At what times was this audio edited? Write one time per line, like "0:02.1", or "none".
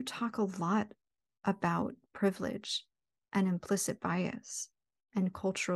none